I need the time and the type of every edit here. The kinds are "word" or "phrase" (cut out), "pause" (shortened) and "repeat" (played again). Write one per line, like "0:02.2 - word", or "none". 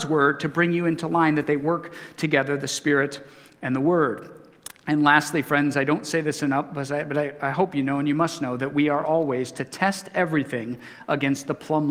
none